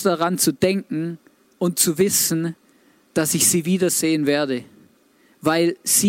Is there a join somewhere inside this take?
no; 0 cuts

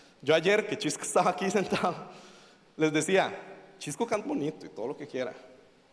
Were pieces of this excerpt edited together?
yes; 1 cut; at 4.2 s

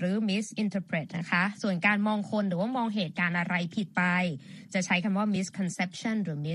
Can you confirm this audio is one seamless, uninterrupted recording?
yes; 0 cuts

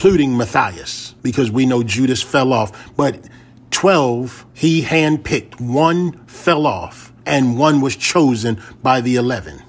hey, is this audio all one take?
no; 3 cuts; at 1.2 s, 4.5 s, 7.2 s

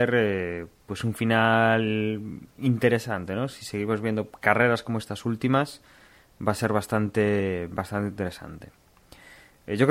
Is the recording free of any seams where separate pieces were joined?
yes; 0 cuts

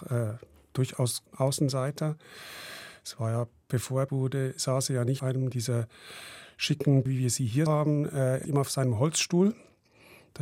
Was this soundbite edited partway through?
yes; 6 cuts; at 1.3 s, 4.1 s, 5.2 s, 7.1 s, 7.7 s, 8.4 s

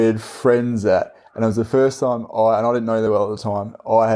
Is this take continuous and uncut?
yes; 0 cuts

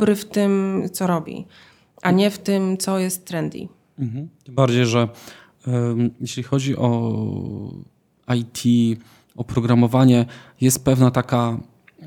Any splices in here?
no; 0 cuts

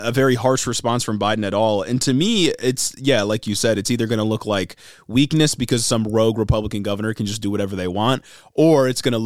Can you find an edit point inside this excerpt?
no; 0 cuts

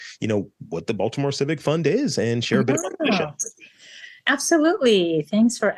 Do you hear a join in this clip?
no; 0 cuts

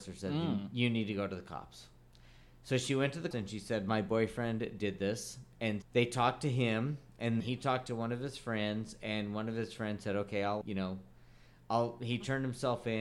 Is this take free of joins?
no; 4 cuts; at 3.3 s, 5.8 s, 7.4 s, 10.6 s

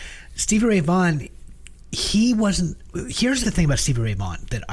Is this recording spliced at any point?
yes; 1 cut; at 3.4 s

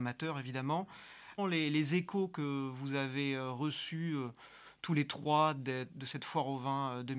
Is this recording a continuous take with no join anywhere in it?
no; 1 cut; at 1.4 s

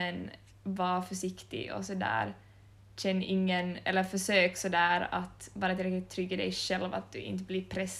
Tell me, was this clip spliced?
no; 0 cuts

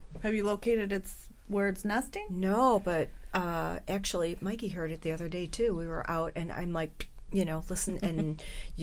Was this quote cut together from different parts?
no; 0 cuts

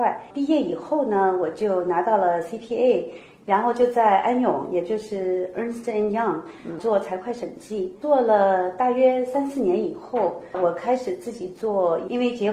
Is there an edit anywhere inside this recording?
no; 0 cuts

